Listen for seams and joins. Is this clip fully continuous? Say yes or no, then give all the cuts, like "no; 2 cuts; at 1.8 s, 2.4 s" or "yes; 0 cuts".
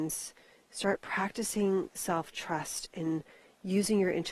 yes; 0 cuts